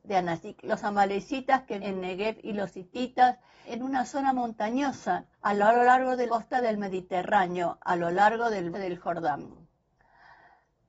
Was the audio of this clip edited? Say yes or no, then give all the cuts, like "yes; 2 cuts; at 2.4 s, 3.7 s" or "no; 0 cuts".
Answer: yes; 5 cuts; at 1.8 s, 3.6 s, 5.3 s, 6.3 s, 8.7 s